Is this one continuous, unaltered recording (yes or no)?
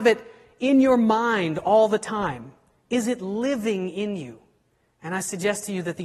yes